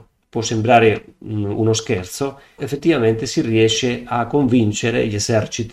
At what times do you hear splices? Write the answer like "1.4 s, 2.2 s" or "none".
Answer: 2.6 s